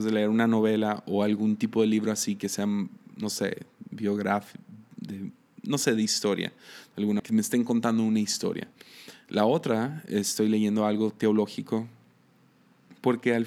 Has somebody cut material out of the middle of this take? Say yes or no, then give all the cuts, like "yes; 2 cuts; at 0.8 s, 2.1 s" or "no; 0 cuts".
yes; 1 cut; at 7.2 s